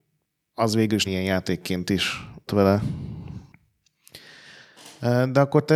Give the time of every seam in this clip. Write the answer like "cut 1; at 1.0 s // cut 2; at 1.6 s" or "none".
cut 1; at 1.1 s // cut 2; at 2.5 s